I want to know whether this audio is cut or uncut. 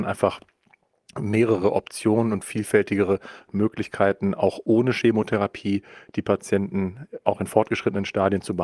uncut